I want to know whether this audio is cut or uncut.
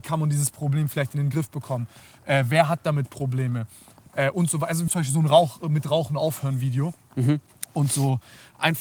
cut